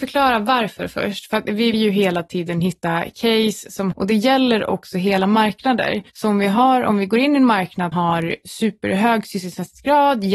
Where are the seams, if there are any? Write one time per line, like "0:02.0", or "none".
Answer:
0:01.7
0:03.9
0:06.1
0:07.9